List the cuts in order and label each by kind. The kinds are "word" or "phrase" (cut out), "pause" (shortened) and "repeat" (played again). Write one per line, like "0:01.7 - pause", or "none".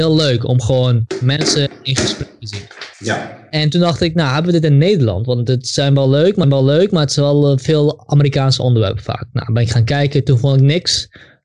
0:02.9 - pause
0:06.4 - repeat